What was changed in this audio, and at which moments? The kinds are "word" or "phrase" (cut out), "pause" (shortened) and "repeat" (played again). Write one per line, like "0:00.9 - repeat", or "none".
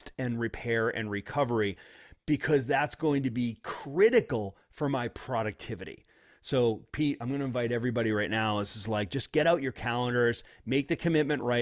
none